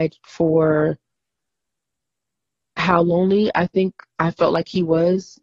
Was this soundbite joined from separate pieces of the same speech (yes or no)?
no